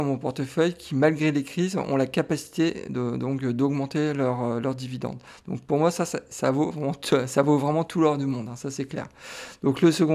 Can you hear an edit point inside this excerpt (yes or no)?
no